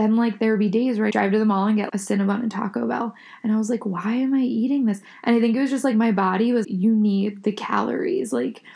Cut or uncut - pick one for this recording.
cut